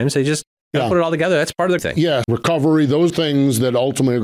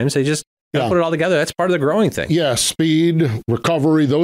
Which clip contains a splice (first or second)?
first